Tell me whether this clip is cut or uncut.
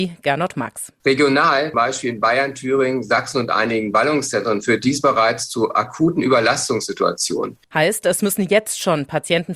cut